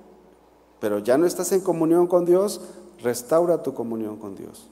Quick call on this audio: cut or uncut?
uncut